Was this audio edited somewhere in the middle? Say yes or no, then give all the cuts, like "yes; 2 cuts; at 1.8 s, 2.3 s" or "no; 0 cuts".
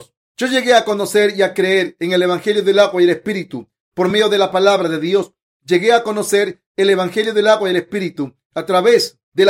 no; 0 cuts